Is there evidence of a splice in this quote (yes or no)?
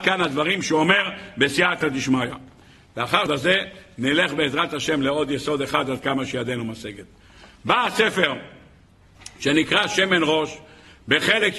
yes